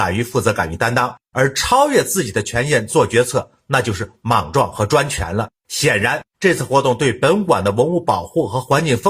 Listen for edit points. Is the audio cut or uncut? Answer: cut